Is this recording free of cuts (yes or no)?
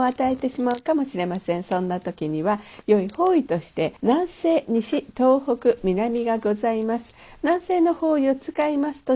no